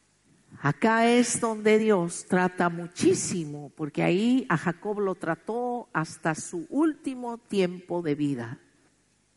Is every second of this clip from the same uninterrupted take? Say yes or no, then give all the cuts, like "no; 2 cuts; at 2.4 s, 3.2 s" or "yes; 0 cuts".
yes; 0 cuts